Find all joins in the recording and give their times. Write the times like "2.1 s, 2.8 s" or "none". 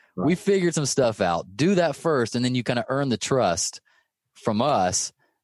none